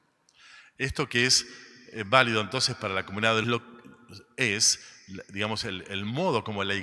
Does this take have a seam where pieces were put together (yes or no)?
yes